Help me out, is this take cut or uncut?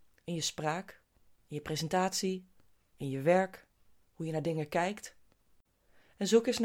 uncut